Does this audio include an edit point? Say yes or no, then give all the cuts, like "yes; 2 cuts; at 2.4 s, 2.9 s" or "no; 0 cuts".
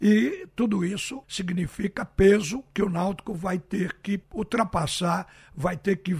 yes; 3 cuts; at 1.2 s, 2.7 s, 4.2 s